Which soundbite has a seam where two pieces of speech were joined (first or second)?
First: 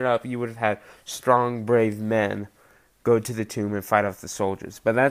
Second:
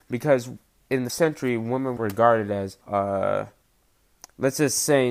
second